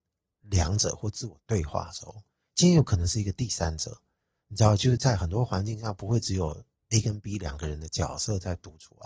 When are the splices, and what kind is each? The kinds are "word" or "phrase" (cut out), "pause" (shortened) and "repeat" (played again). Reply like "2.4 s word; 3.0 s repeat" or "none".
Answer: none